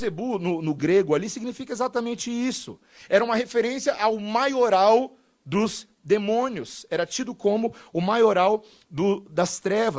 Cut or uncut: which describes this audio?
uncut